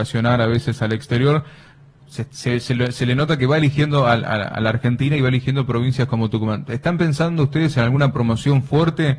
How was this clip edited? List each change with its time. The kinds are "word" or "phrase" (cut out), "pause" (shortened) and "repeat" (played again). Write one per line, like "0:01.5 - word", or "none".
none